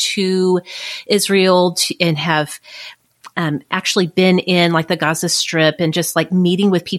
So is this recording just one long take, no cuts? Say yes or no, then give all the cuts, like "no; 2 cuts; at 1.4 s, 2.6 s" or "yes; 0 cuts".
yes; 0 cuts